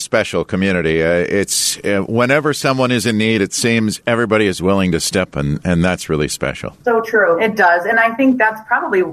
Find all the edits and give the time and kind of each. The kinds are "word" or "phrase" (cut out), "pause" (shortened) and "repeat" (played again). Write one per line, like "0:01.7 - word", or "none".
0:05.3 - phrase
0:06.8 - pause